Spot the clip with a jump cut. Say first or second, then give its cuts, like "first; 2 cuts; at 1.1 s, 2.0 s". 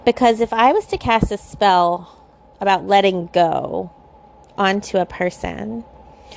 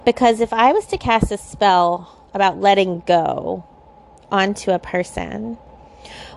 second; 1 cut; at 2.3 s